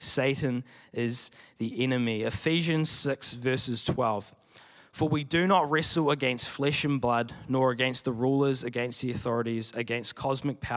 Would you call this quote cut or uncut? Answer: uncut